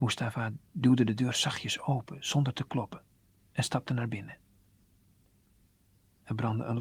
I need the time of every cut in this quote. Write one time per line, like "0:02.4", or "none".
0:03.2